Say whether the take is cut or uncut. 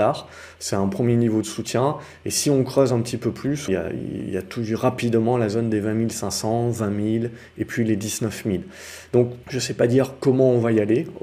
cut